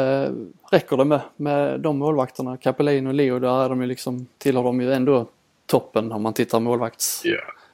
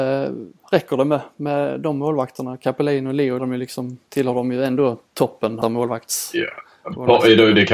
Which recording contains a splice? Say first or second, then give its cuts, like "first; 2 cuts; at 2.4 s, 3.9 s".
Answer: second; 3 cuts; at 3.4 s, 5.1 s, 5.6 s